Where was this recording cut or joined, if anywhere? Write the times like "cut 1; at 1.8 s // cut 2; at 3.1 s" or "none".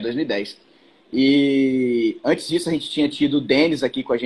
none